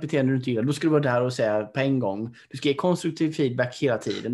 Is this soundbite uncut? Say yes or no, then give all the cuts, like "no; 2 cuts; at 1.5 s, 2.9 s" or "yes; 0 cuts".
yes; 0 cuts